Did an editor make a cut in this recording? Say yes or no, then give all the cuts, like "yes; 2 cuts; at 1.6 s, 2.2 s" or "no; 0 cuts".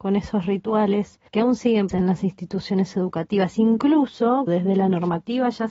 yes; 3 cuts; at 1.3 s, 1.9 s, 4.5 s